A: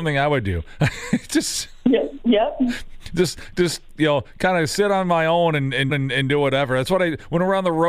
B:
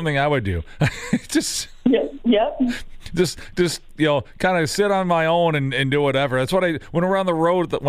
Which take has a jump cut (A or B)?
A